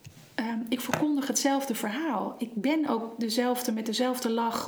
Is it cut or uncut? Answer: uncut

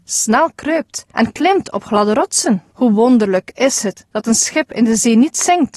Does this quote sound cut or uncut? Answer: cut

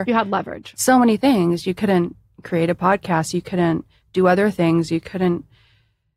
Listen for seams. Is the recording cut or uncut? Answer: uncut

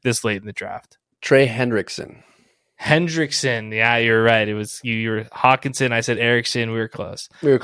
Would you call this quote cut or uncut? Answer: uncut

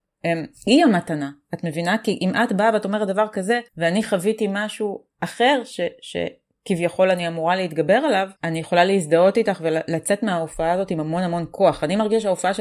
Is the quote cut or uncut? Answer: cut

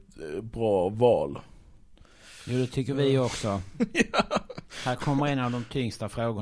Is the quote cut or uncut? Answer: uncut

